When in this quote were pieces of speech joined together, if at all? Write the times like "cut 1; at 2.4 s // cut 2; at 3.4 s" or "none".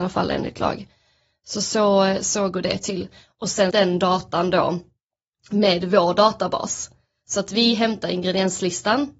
cut 1; at 3.7 s